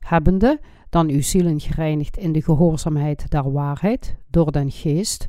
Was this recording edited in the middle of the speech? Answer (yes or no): no